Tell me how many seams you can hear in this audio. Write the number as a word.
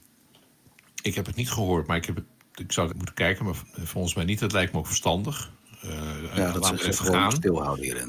one